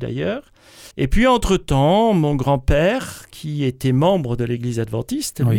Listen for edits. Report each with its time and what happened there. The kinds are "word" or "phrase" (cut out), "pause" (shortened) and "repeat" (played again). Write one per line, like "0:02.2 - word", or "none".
0:00.9 - pause